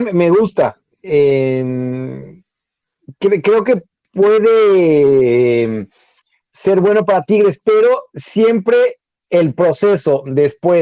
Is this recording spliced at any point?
no; 0 cuts

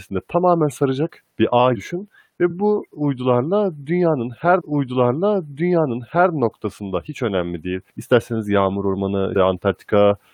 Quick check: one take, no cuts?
no; 5 cuts; at 1.3 s, 1.7 s, 4.6 s, 7.9 s, 9.3 s

